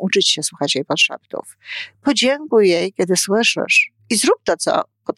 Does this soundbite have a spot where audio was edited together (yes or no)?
yes